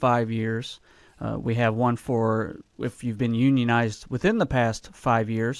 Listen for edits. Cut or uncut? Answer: cut